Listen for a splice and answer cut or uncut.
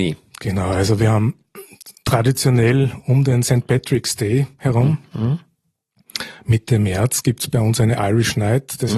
uncut